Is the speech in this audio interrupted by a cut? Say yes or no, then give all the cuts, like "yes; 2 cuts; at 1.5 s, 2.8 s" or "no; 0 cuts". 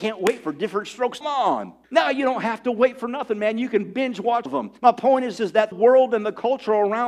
yes; 6 cuts; at 1.2 s, 1.8 s, 4.5 s, 4.8 s, 5.4 s, 5.7 s